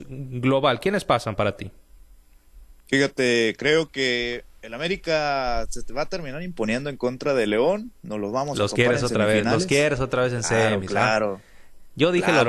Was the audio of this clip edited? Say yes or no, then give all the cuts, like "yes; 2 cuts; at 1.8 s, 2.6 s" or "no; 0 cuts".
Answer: yes; 1 cut; at 2.8 s